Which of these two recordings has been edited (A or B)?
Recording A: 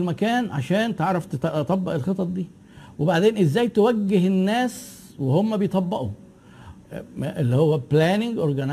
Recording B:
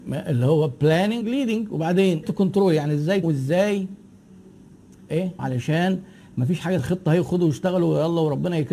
B